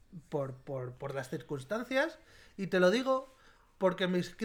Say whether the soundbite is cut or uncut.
uncut